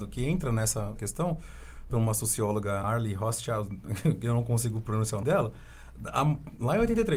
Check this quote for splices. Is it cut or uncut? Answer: cut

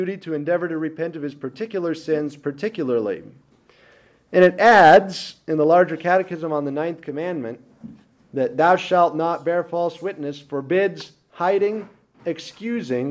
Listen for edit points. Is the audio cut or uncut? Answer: uncut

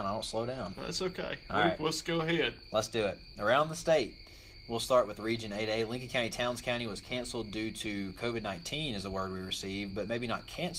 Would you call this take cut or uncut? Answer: uncut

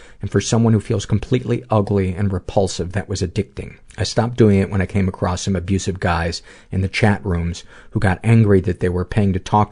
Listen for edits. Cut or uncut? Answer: cut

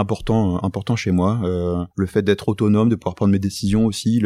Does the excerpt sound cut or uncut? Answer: cut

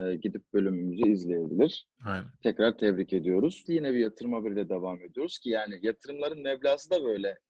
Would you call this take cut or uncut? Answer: cut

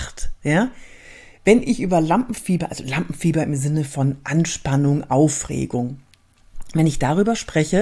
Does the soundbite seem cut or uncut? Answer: uncut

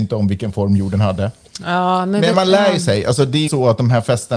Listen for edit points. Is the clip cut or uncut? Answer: cut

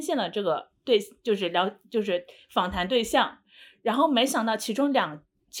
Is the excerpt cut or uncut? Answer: uncut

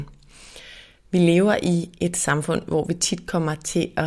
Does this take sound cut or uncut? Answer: uncut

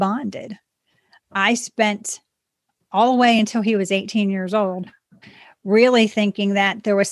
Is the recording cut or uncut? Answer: uncut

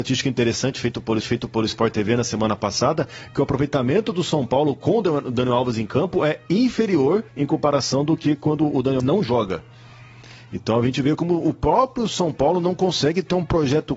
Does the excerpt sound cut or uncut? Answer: cut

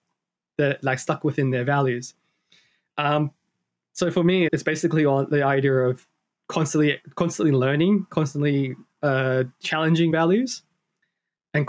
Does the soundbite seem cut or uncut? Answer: cut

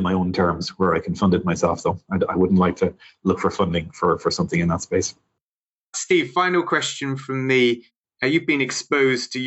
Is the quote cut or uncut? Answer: uncut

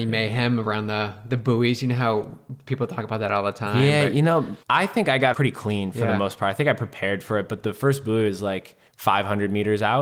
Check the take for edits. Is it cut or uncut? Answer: cut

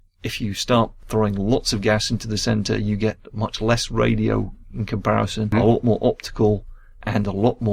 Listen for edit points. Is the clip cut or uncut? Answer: uncut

